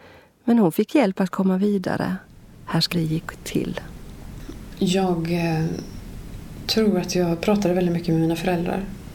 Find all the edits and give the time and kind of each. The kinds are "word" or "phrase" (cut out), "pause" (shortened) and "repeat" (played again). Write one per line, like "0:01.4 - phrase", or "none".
0:02.9 - phrase